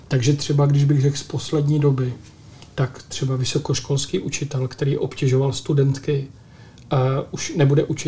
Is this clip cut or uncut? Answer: uncut